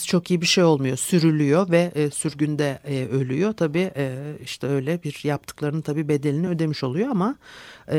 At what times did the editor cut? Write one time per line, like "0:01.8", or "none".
none